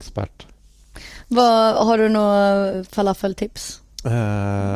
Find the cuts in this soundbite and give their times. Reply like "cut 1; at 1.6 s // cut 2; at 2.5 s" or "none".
cut 1; at 2.7 s